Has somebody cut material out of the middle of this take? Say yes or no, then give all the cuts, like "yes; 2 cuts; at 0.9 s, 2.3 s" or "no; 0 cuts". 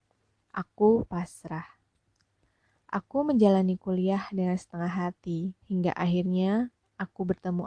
yes; 1 cut; at 5.6 s